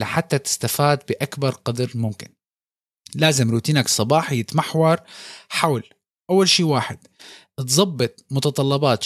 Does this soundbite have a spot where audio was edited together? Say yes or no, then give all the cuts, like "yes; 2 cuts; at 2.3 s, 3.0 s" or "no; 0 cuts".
no; 0 cuts